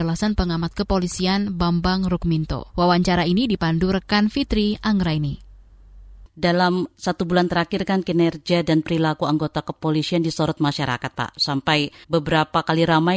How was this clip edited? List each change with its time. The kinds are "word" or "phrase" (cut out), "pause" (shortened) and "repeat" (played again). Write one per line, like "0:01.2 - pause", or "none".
0:02.7 - pause
0:12.0 - pause